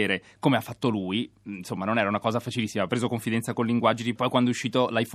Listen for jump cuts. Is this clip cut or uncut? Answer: cut